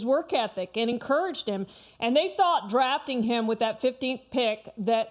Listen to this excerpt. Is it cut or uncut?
uncut